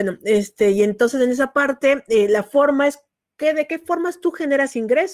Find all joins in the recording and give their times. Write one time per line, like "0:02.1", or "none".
none